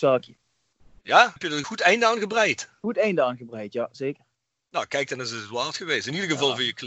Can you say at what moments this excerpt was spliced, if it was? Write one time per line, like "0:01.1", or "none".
none